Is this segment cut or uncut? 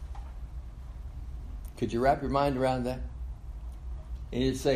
uncut